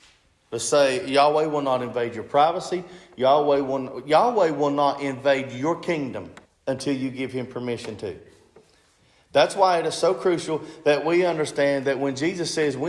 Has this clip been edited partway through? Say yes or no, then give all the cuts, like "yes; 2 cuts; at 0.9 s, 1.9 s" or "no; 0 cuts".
yes; 1 cut; at 6.5 s